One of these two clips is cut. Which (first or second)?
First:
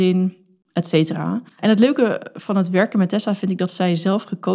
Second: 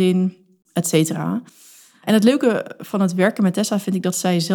first